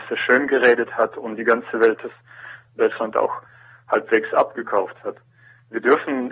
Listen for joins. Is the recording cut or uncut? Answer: uncut